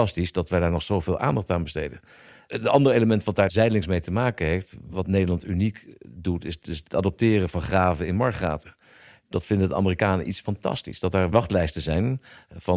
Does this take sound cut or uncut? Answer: uncut